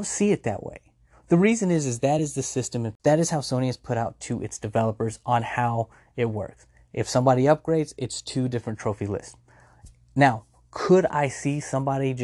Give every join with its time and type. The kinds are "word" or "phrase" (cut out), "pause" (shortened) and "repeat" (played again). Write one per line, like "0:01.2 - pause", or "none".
none

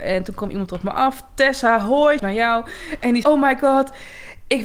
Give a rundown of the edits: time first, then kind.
0:02.2 - word
0:03.2 - word

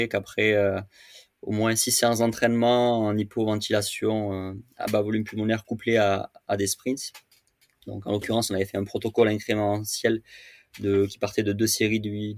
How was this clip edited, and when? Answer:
none

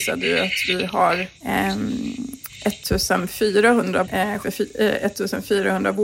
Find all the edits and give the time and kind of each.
0:01.4 - pause
0:04.0 - word
0:04.4 - word

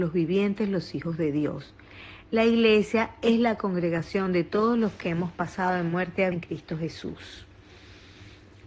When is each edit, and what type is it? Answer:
0:06.3 - word

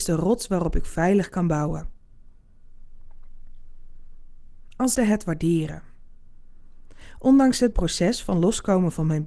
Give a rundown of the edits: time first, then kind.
0:04.9 - word
0:07.7 - word

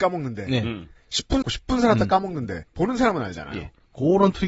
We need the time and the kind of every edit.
0:01.4 - phrase
0:02.7 - pause

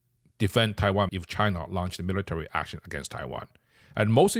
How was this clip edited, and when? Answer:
0:01.1 - word

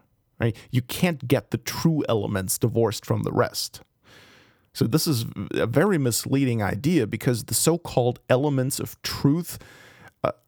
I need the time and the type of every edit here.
0:01.2 - word

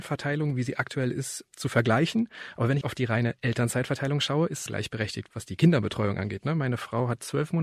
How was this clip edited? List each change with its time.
0:02.8 - word
0:04.7 - phrase

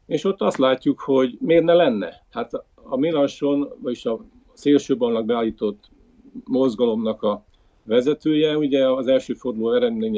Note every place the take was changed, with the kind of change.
none

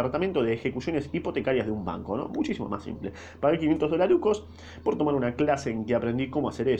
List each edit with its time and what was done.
none

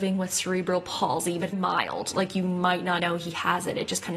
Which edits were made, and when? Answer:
0:01.5 - word
0:03.0 - word

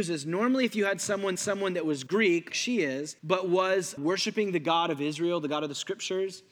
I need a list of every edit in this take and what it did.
0:01.3 - repeat
0:02.5 - word
0:03.2 - pause
0:04.0 - word

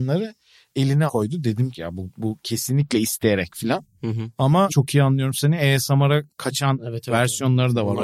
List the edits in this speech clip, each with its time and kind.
0:01.1 - word
0:01.7 - phrase
0:04.7 - phrase
0:06.3 - pause

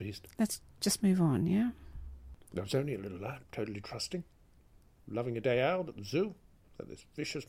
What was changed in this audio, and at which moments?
0:03.4 - pause

